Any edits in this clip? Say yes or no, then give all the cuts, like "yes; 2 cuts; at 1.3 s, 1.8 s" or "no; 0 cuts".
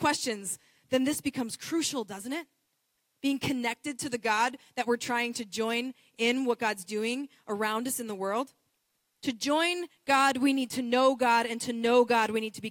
no; 0 cuts